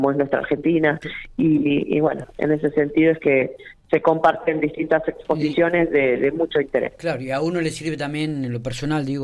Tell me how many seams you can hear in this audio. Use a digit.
0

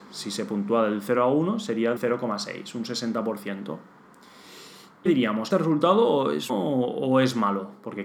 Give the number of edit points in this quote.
4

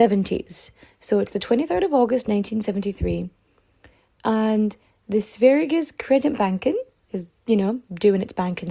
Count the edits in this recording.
0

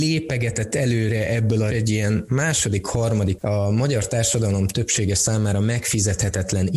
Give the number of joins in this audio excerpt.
2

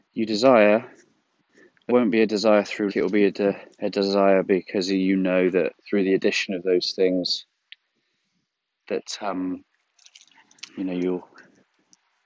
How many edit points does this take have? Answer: 4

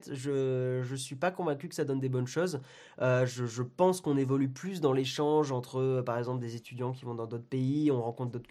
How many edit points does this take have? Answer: 0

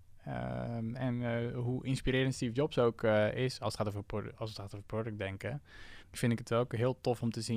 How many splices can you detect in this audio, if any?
1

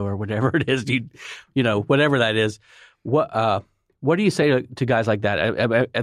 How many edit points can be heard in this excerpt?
0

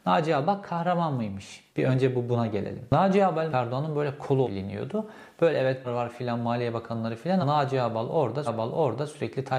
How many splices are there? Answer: 6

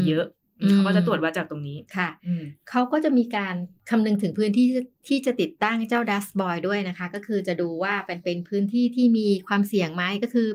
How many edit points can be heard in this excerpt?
1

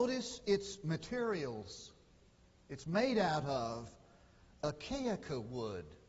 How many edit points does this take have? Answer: 0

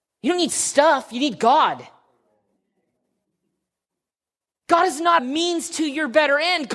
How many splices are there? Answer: 1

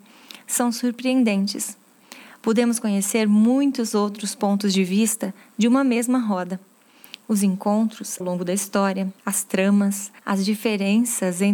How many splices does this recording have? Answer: 3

